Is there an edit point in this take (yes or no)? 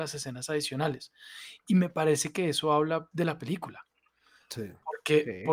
yes